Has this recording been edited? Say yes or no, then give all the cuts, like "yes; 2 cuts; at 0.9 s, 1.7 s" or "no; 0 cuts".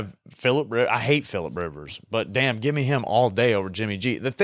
no; 0 cuts